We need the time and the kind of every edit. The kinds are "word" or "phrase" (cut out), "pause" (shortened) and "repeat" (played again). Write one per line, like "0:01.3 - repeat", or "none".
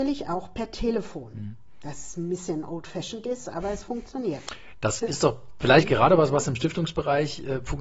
none